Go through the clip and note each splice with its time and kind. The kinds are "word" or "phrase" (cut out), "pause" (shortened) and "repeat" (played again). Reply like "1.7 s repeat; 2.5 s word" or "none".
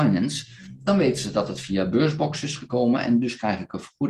none